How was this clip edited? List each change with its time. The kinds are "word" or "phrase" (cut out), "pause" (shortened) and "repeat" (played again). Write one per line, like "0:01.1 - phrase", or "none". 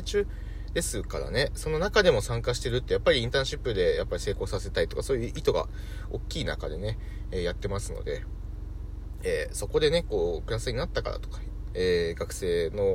0:11.7 - word